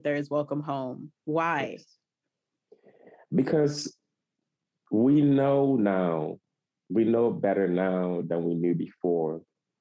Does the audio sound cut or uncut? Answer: uncut